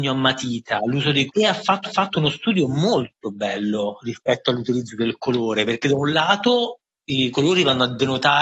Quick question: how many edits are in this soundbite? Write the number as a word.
two